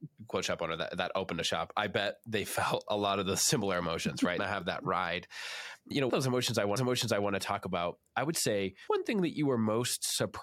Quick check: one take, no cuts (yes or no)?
no